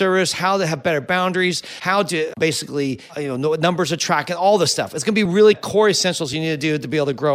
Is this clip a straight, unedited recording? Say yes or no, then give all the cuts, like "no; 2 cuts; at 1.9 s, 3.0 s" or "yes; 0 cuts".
yes; 0 cuts